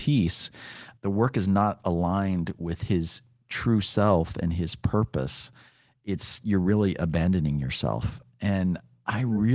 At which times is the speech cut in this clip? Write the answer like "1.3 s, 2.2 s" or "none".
1.0 s